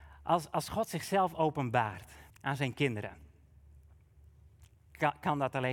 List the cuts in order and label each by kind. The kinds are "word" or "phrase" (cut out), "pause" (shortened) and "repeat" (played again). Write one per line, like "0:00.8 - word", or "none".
0:02.3 - pause